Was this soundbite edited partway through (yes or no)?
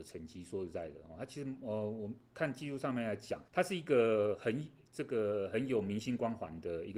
yes